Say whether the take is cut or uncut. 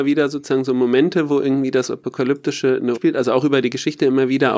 cut